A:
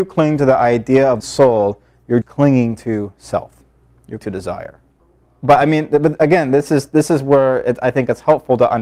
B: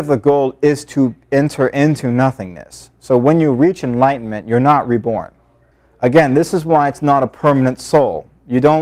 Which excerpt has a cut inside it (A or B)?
A